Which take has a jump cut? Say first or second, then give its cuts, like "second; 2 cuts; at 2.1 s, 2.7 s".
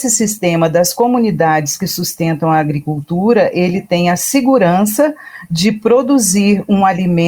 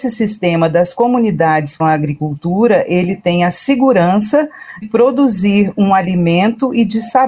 second; 2 cuts; at 1.8 s, 4.8 s